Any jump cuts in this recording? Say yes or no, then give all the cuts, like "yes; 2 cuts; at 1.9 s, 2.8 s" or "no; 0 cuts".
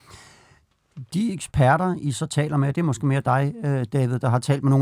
no; 0 cuts